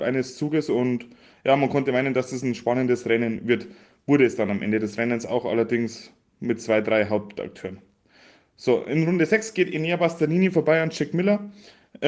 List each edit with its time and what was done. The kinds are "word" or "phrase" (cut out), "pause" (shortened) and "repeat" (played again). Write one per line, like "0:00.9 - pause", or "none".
none